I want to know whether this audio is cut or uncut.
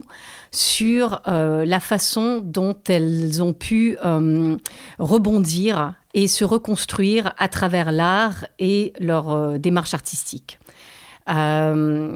uncut